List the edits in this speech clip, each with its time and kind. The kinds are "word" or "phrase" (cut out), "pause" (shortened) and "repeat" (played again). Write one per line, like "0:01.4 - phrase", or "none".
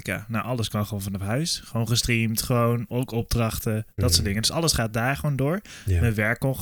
none